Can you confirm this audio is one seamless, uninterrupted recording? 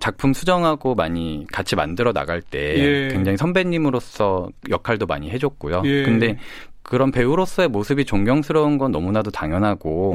yes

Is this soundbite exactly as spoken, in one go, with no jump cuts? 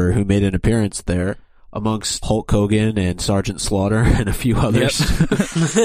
no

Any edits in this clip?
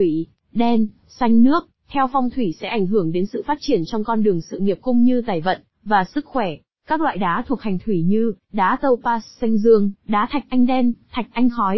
yes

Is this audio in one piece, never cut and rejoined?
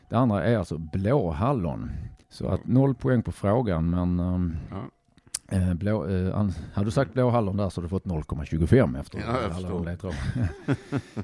no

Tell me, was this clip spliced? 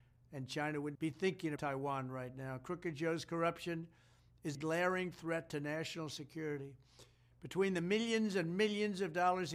yes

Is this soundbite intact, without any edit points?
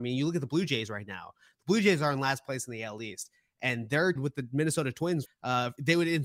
no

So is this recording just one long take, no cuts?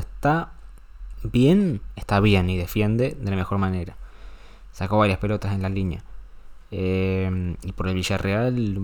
yes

